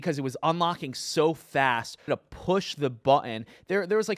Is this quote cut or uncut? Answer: cut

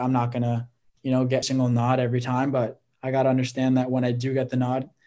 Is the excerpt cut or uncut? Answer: cut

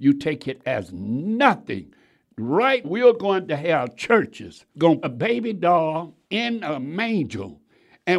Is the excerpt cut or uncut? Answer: cut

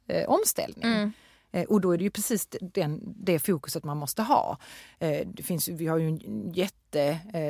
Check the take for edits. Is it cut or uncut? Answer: uncut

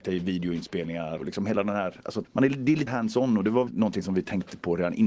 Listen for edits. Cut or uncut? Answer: cut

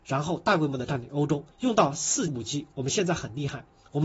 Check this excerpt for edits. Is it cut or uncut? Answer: cut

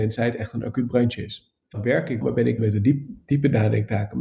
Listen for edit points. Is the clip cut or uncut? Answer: cut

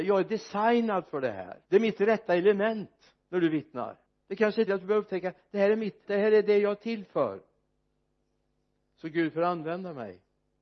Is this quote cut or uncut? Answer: cut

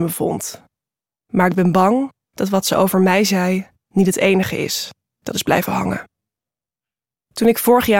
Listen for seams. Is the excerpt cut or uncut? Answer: uncut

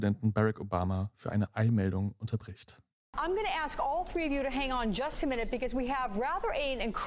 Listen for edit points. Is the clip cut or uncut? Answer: cut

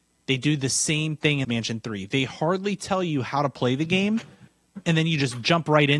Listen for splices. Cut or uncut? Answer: cut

